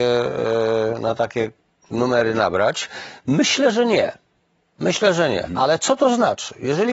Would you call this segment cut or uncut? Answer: uncut